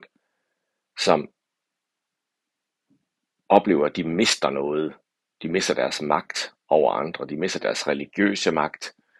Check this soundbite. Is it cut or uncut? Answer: uncut